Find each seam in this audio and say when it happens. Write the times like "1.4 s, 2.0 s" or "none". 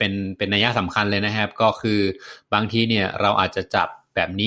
none